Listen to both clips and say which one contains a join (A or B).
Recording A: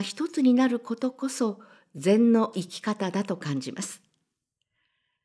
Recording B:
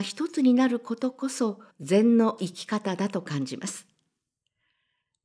B